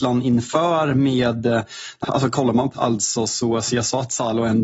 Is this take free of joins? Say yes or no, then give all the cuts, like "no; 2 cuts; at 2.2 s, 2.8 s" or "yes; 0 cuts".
no; 2 cuts; at 2.0 s, 2.7 s